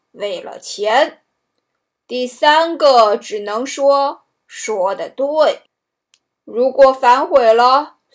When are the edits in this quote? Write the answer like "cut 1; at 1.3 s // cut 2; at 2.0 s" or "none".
cut 1; at 5.7 s